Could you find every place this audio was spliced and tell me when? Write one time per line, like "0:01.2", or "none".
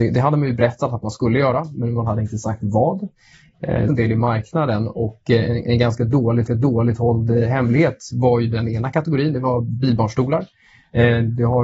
0:03.9
0:06.5